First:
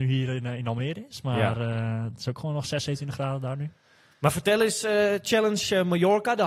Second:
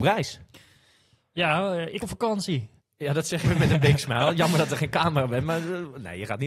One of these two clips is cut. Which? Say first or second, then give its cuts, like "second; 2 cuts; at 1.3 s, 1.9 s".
second; 3 cuts; at 2.0 s, 2.8 s, 3.4 s